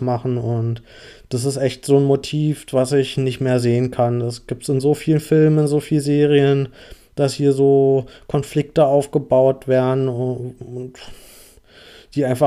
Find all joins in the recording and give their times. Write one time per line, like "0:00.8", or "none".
none